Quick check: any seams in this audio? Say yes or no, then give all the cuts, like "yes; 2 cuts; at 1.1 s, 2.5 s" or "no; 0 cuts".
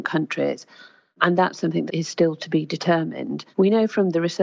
yes; 2 cuts; at 1.9 s, 3.5 s